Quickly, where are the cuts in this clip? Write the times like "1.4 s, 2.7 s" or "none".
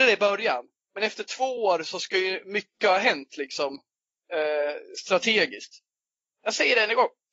none

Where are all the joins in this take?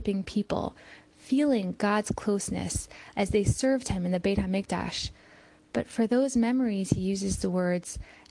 none

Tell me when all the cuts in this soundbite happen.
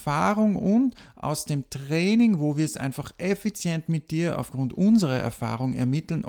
none

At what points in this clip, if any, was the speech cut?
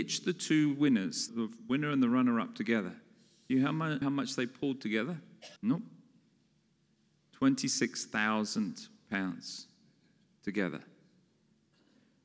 1.3 s, 4.0 s, 5.6 s

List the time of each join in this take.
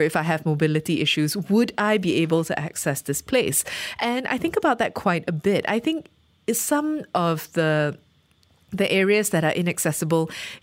none

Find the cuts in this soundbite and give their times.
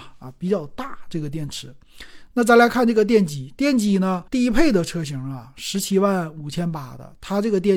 4.3 s

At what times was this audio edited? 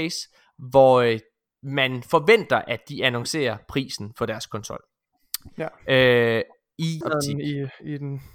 7.0 s

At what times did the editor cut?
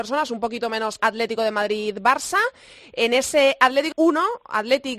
1.0 s, 3.9 s

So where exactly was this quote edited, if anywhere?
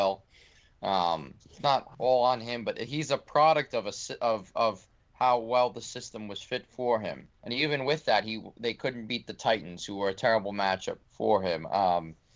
1.4 s, 7.4 s, 11.0 s

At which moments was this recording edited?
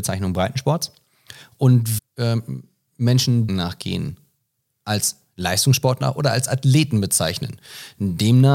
2.0 s, 3.5 s

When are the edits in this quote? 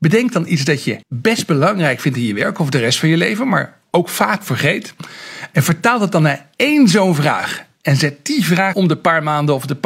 1.0 s, 8.7 s

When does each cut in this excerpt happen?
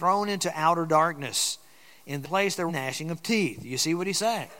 2.2 s, 2.7 s

